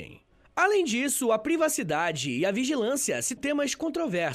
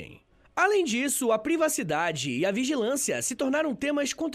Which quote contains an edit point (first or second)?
first